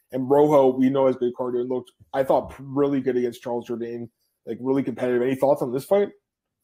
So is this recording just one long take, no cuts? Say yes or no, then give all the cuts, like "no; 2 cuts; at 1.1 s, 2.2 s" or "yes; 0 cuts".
yes; 0 cuts